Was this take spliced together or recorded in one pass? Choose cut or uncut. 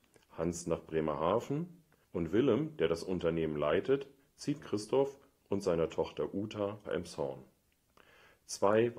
cut